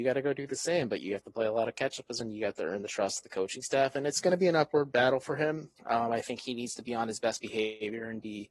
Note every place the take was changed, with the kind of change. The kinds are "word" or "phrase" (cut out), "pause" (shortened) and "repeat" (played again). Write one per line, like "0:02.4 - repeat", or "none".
0:02.2 - word
0:05.7 - pause